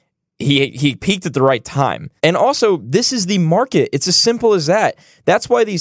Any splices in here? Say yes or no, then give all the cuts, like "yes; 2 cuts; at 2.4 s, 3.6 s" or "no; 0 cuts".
yes; 1 cut; at 2.2 s